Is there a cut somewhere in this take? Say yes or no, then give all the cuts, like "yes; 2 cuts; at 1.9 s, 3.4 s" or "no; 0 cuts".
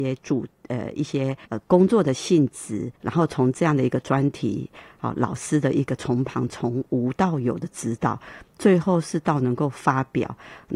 yes; 2 cuts; at 1.4 s, 2.9 s